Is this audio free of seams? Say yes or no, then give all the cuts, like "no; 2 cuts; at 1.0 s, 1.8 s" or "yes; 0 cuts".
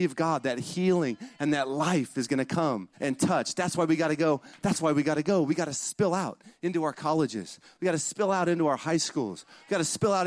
no; 1 cut; at 2.9 s